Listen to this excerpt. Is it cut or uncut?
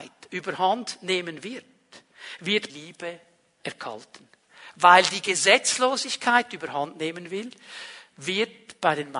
cut